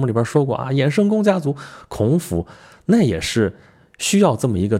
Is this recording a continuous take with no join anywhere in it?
yes; 0 cuts

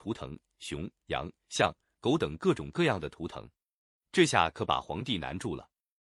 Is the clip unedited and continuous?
no; 1 cut; at 1.0 s

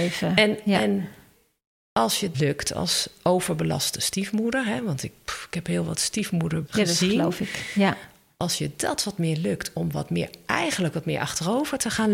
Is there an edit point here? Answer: yes; 2 cuts; at 2.3 s, 6.7 s

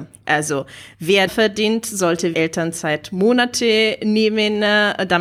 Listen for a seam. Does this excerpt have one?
yes; 2 cuts; at 1.3 s, 2.3 s

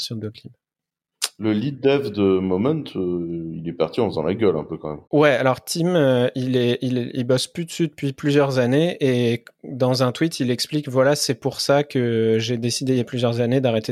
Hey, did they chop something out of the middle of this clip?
yes; 1 cut; at 5.1 s

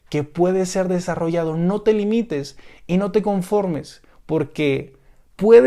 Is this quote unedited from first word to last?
yes; 0 cuts

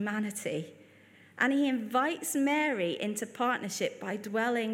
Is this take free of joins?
yes; 0 cuts

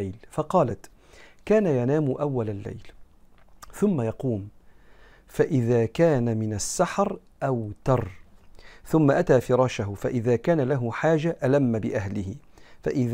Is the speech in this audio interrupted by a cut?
no; 0 cuts

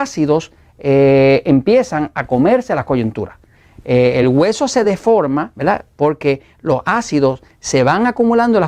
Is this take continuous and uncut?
yes; 0 cuts

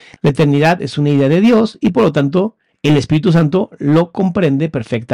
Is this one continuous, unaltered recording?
yes; 0 cuts

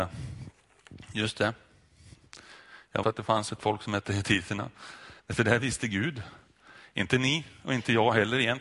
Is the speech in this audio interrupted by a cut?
yes; 2 cuts; at 3.0 s, 5.2 s

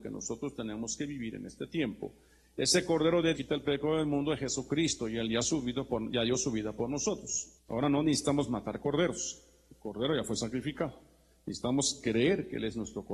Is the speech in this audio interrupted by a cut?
yes; 2 cuts; at 3.3 s, 7.6 s

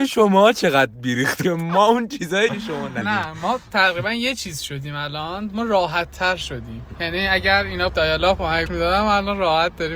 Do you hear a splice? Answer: yes; 6 cuts; at 1.4 s, 2.5 s, 3.0 s, 6.9 s, 7.9 s, 8.7 s

